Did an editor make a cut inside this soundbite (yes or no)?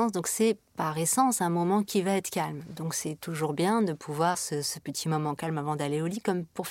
yes